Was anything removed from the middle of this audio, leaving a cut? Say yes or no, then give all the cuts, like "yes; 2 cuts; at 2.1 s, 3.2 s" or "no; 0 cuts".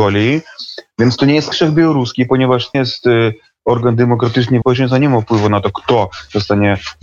yes; 3 cuts; at 1.5 s, 2.7 s, 4.6 s